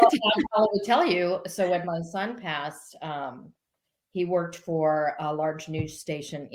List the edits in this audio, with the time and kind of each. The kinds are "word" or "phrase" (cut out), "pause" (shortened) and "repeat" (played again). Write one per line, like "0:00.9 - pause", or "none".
none

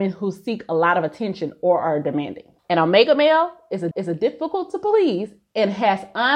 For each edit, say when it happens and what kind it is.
0:02.6 - pause
0:03.9 - repeat

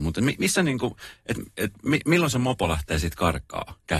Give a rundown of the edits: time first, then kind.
none

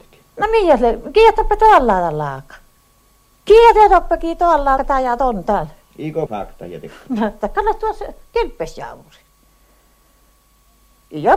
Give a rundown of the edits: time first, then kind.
0:04.8 - word
0:06.3 - word
0:07.4 - word

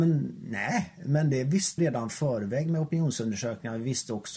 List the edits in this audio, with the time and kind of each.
0:01.8 - phrase

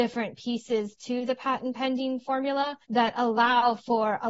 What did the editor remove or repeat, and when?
0:02.8 - pause

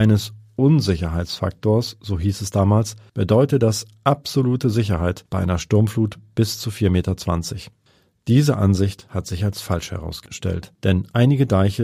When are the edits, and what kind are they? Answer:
none

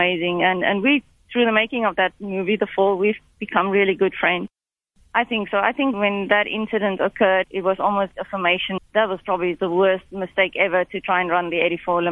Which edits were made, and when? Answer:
0:05.9 - word
0:07.4 - word
0:08.1 - word
0:08.8 - word

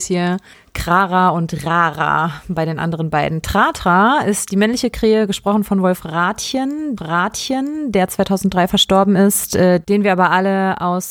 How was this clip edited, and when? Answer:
0:07.0 - repeat

